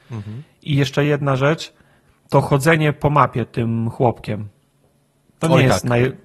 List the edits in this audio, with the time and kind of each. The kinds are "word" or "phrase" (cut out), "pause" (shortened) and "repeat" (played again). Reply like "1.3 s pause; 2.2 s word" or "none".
none